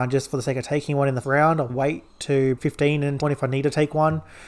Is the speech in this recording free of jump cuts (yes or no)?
no